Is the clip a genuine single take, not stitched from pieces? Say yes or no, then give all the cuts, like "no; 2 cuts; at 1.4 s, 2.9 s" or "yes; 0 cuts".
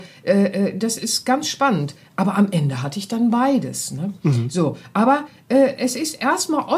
yes; 0 cuts